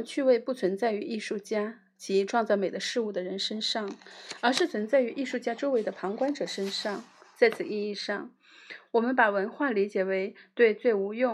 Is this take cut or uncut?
uncut